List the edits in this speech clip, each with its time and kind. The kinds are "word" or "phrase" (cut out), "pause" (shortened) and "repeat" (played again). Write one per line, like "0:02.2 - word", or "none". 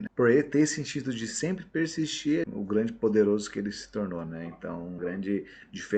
0:02.4 - phrase
0:05.0 - word